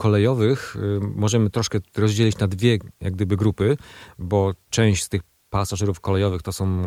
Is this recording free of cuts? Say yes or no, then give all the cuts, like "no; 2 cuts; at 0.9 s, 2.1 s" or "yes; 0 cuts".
yes; 0 cuts